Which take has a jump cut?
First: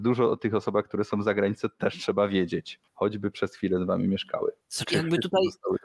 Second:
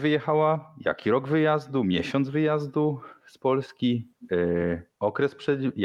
first; 2 cuts; at 2.9 s, 4.8 s

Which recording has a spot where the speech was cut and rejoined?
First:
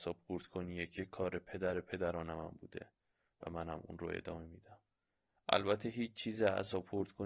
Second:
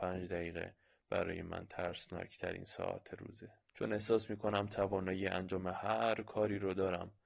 second; 1 cut; at 3.6 s

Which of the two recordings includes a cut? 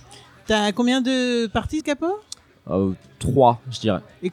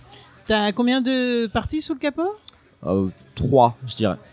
first; 1 cut; at 1.8 s

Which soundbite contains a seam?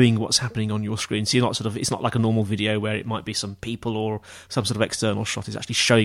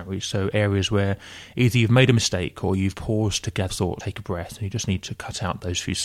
second; 3 cuts; at 2.9 s, 3.7 s, 4.0 s

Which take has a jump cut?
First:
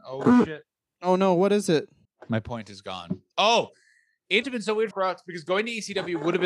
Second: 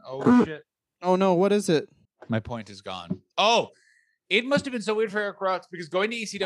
first; 2 cuts; at 4.4 s, 4.9 s

